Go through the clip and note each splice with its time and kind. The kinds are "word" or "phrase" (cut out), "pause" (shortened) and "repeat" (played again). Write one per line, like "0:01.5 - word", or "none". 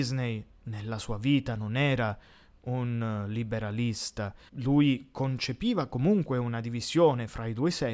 0:04.5 - word